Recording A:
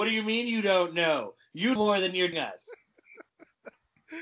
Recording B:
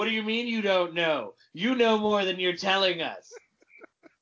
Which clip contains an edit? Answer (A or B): A